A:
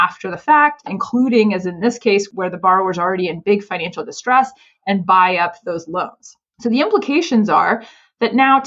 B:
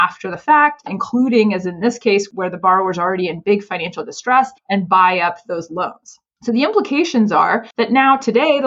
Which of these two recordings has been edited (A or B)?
B